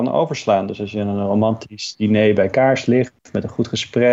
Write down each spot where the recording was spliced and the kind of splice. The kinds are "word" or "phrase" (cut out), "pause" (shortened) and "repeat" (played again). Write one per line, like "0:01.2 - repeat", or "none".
none